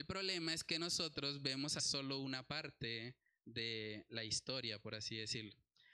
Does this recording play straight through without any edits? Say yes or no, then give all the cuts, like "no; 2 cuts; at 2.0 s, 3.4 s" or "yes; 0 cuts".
no; 1 cut; at 1.8 s